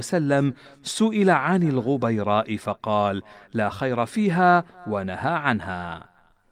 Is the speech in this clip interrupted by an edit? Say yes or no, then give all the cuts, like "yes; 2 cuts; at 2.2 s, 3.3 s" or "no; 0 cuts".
no; 0 cuts